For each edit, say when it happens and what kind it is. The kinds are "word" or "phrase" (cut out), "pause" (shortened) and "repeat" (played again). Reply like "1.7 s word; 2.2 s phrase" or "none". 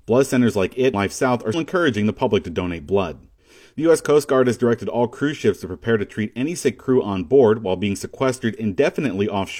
0.9 s word; 1.5 s word; 6.8 s phrase